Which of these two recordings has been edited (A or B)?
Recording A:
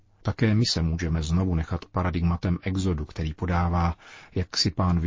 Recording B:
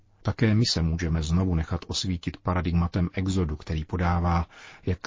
A